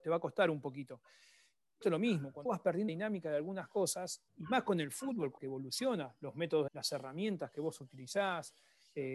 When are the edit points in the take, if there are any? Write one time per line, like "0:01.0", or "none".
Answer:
0:01.8
0:02.5
0:02.9
0:04.3
0:05.4
0:06.7